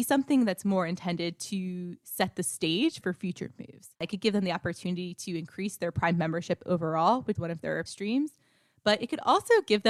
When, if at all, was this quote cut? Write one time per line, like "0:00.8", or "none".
0:03.0
0:03.9
0:07.4
0:07.9